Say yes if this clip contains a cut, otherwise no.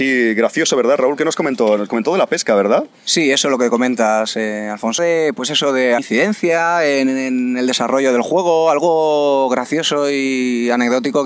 yes